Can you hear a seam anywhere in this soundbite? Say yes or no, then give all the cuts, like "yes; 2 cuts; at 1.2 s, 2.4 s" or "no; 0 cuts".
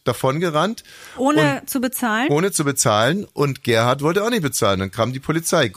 no; 0 cuts